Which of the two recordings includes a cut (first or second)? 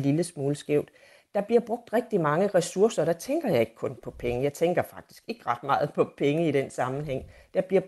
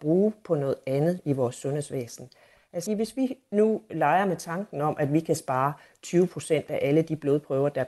second